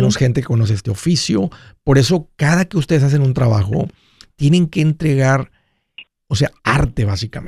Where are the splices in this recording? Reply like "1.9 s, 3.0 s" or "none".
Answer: none